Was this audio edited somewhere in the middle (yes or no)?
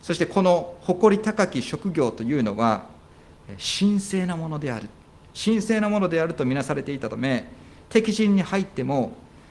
no